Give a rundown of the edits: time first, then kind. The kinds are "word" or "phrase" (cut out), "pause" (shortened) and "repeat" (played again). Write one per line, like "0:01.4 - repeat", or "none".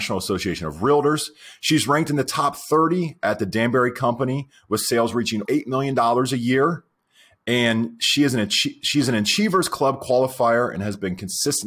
0:05.4 - word